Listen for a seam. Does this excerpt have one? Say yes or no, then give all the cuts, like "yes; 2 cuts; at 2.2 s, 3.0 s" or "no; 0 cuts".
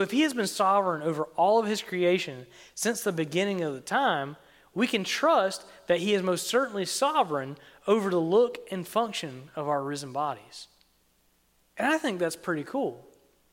no; 0 cuts